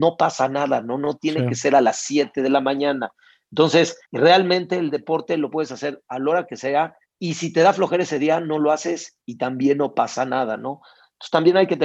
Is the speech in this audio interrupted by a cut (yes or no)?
yes